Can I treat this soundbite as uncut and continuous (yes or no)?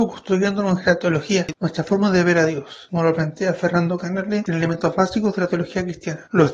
yes